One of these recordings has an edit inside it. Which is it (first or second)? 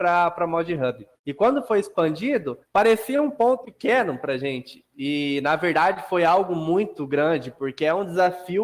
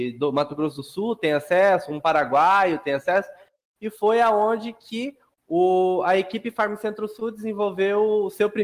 first